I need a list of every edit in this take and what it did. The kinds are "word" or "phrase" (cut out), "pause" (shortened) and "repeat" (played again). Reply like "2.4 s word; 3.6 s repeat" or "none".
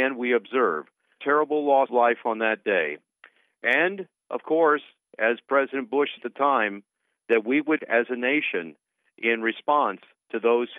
1.2 s word; 1.9 s word; 6.2 s word; 7.8 s word